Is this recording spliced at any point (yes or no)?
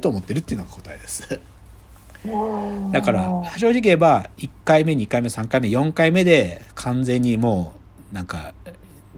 no